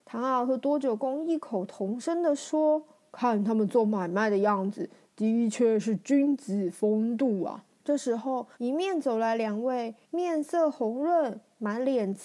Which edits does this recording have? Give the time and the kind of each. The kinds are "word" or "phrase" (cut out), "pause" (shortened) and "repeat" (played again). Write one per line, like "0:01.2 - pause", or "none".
0:07.8 - pause
0:08.5 - pause
0:10.0 - pause